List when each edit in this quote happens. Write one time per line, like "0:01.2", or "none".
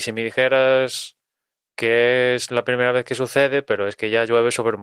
none